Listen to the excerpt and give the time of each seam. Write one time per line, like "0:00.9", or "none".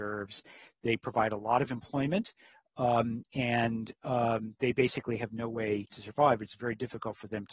none